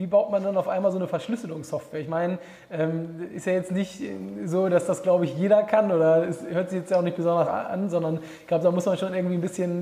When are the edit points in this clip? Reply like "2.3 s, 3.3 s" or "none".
7.5 s